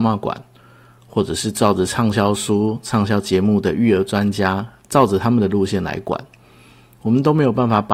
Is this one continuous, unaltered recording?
yes; 0 cuts

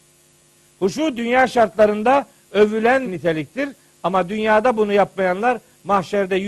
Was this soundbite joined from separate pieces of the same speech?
yes; 1 cut; at 3.0 s

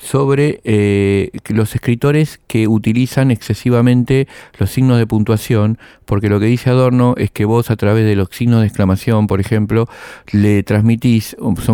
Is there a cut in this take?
no; 0 cuts

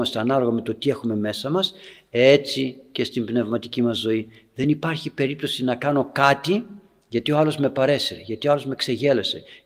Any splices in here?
no; 0 cuts

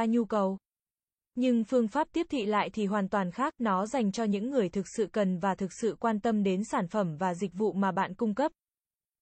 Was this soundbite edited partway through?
no; 0 cuts

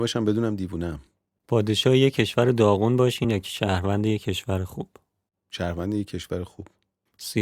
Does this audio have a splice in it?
no; 0 cuts

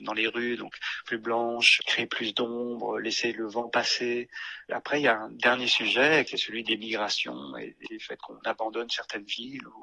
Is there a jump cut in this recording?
yes; 3 cuts; at 1.0 s, 1.8 s, 4.7 s

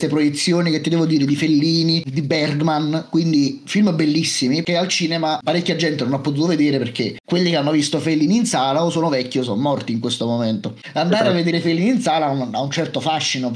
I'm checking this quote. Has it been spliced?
no; 0 cuts

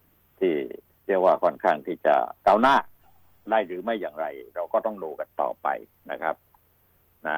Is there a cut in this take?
yes; 1 cut; at 2.4 s

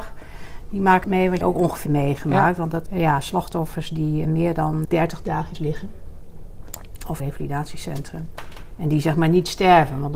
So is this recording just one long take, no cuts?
no; 8 cuts; at 1.0 s, 1.4 s, 1.9 s, 2.9 s, 4.2 s, 4.8 s, 5.5 s, 7.2 s

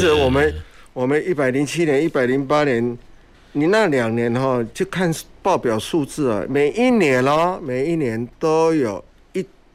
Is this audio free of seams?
no; 1 cut; at 3.3 s

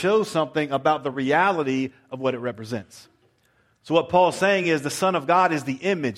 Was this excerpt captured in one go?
yes; 0 cuts

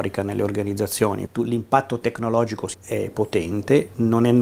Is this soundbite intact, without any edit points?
no; 2 cuts; at 1.3 s, 2.7 s

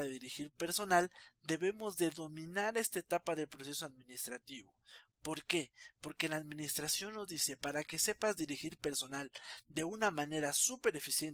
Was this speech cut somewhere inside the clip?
no; 0 cuts

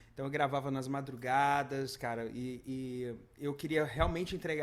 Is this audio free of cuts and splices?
yes; 0 cuts

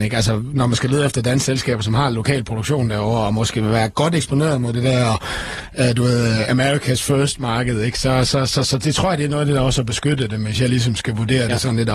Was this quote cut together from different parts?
no; 0 cuts

